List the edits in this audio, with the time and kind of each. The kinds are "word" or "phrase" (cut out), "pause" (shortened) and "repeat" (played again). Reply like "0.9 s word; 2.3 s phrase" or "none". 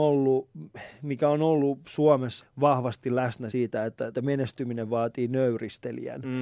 2.4 s word; 3.5 s word; 4.1 s word